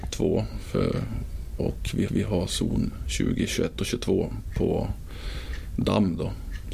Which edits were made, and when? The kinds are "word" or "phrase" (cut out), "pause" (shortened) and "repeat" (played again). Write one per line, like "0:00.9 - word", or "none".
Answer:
0:01.6 - word
0:02.1 - repeat